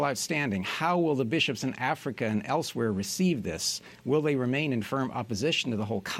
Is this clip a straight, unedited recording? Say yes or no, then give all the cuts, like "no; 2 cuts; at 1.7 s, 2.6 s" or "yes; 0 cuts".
yes; 0 cuts